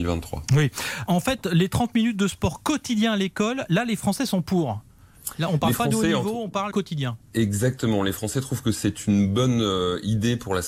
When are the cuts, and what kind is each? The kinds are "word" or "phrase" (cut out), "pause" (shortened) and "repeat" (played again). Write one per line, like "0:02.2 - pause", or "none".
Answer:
0:01.1 - word
0:06.7 - word
0:07.2 - pause